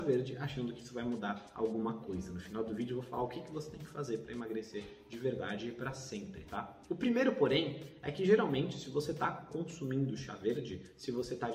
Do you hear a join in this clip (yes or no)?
no